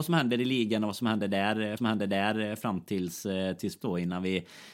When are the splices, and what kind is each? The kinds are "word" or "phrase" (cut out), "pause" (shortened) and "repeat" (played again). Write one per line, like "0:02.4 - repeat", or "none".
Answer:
0:01.8 - repeat
0:03.8 - word